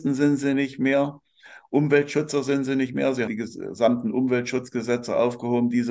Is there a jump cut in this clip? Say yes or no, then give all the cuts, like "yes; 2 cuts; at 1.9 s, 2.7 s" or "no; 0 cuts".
yes; 1 cut; at 3.3 s